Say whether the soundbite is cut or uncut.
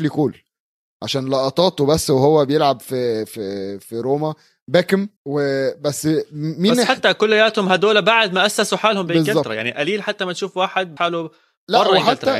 cut